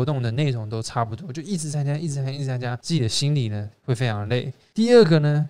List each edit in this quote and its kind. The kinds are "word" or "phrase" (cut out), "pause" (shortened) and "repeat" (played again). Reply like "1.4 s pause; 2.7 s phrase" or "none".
none